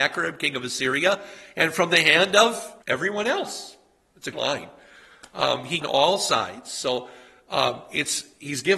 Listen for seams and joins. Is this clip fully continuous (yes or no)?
no